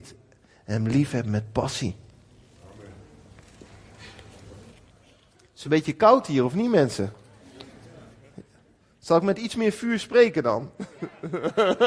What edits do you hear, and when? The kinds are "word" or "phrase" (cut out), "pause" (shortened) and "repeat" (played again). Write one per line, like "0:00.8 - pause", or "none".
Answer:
none